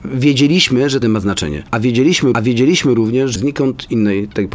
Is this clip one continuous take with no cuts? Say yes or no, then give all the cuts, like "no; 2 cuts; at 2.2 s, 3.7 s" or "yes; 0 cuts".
no; 3 cuts; at 1.0 s, 2.3 s, 3.4 s